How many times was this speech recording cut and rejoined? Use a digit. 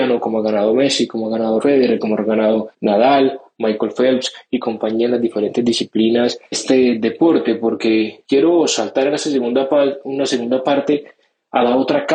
4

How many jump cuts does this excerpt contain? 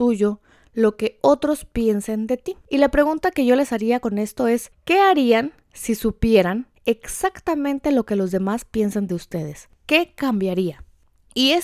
2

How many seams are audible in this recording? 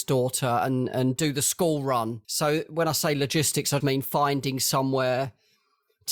2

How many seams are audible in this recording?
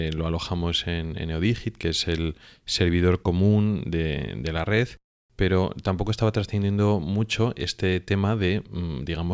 0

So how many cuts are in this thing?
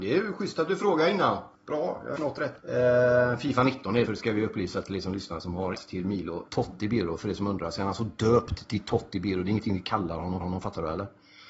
7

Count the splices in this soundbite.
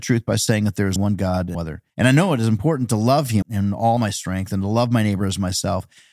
5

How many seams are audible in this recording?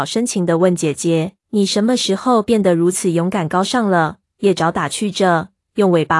1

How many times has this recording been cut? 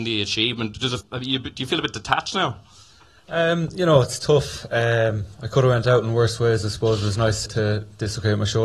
2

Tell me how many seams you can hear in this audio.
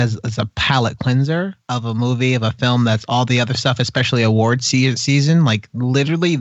1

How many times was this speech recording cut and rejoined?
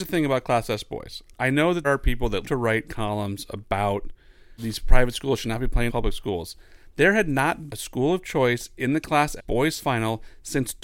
7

